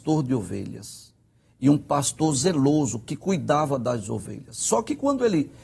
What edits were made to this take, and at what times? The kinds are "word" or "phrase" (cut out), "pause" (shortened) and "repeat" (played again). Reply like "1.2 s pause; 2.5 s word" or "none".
none